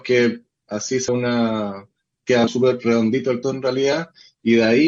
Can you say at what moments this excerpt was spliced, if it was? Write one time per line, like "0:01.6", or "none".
0:01.1
0:02.5
0:03.4